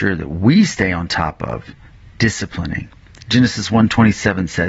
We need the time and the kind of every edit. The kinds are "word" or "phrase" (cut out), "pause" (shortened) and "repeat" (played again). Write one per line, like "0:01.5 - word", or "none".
none